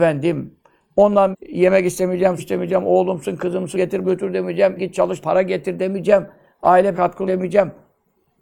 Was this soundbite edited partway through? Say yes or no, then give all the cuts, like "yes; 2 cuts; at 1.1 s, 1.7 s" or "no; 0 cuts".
yes; 8 cuts; at 1.3 s, 2.4 s, 3.7 s, 4.0 s, 4.8 s, 5.2 s, 6.9 s, 7.3 s